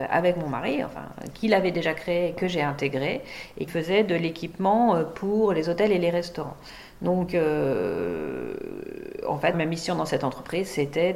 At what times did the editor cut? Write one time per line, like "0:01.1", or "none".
0:03.7
0:09.5